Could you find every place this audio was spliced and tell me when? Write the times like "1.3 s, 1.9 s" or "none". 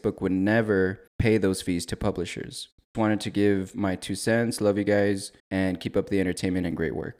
1.1 s, 2.9 s, 5.4 s